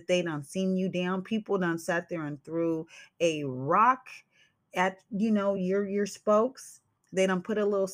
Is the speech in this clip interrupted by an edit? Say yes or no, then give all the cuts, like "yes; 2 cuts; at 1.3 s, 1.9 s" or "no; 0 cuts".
no; 0 cuts